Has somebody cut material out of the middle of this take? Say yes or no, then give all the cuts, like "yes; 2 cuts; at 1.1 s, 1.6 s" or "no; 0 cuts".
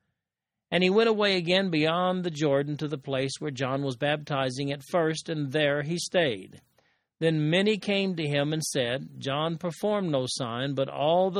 no; 0 cuts